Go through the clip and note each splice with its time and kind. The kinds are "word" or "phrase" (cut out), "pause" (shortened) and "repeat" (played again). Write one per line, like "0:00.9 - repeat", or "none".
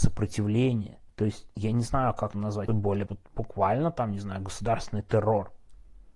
0:01.1 - pause
0:02.3 - word
0:02.7 - word
0:03.1 - phrase